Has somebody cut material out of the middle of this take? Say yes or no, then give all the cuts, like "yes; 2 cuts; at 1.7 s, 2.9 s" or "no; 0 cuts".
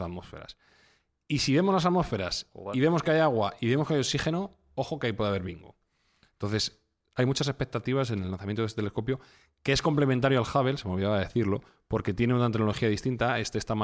no; 0 cuts